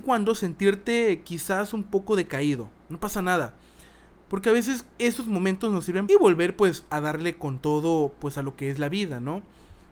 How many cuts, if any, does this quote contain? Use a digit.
2